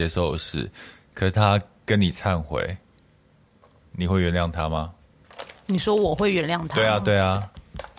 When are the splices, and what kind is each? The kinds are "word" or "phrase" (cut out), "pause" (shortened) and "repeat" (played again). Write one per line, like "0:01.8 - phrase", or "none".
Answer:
none